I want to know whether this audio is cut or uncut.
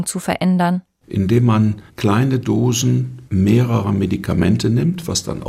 cut